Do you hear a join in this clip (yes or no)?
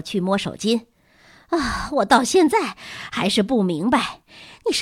no